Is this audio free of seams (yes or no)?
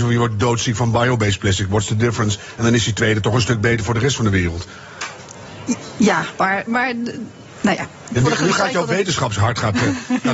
yes